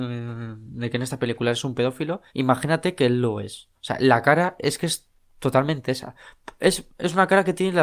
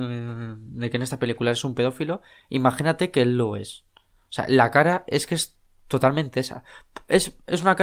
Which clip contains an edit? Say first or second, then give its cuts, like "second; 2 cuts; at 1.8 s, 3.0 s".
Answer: first; 2 cuts; at 2.3 s, 3.7 s